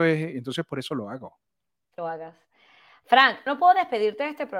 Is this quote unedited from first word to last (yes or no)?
no